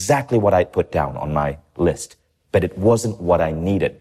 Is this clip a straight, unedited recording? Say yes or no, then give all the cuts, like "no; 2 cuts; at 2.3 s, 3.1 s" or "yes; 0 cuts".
yes; 0 cuts